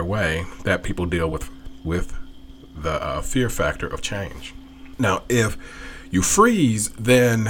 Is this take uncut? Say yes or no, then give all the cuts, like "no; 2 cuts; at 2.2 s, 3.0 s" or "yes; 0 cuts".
yes; 0 cuts